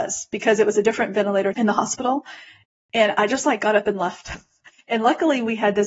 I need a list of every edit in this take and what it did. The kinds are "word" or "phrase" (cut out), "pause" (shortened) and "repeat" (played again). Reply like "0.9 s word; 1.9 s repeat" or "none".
1.5 s phrase